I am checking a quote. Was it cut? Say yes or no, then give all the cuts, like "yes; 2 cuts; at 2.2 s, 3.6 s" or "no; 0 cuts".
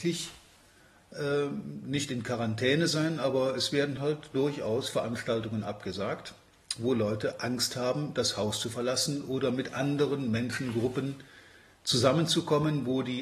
no; 0 cuts